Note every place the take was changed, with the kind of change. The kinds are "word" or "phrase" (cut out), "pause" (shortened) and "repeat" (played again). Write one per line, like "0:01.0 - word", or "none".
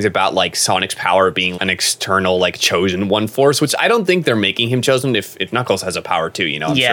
0:01.6 - word